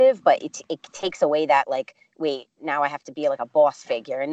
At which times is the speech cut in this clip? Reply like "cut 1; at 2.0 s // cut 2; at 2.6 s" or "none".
none